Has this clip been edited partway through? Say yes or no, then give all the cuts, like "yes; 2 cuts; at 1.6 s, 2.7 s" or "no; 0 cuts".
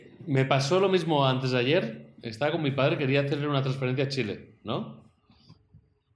no; 0 cuts